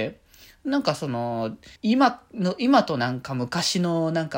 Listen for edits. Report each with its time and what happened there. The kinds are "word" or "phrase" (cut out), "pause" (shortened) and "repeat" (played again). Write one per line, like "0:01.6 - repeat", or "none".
0:01.8 - pause